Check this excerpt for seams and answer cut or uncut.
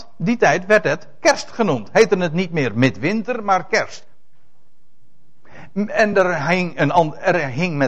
uncut